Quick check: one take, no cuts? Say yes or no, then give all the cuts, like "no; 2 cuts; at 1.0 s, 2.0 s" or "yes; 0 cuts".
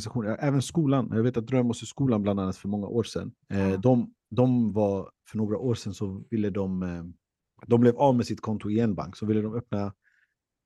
no; 3 cuts; at 3.4 s, 4.2 s, 7.5 s